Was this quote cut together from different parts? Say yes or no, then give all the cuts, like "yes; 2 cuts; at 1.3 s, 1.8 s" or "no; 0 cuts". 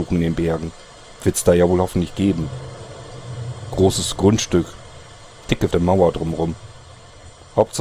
yes; 1 cut; at 5.7 s